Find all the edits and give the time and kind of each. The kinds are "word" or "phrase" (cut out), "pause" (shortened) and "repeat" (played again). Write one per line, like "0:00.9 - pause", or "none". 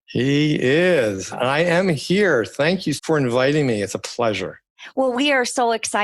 0:03.0 - phrase